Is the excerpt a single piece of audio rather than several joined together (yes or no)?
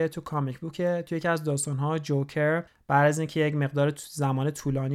yes